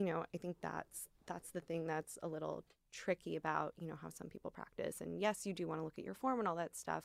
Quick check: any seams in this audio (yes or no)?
yes